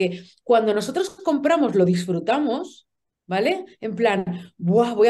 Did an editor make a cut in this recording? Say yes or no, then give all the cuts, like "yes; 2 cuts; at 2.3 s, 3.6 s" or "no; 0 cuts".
no; 0 cuts